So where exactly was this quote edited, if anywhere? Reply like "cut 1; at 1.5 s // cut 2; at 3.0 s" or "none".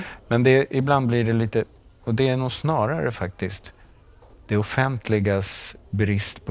none